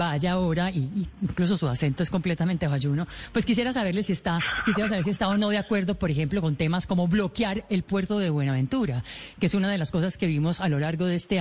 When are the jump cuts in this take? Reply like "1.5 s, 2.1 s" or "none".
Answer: none